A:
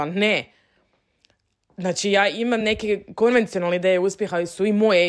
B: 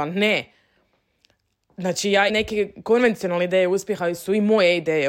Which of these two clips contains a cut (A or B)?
B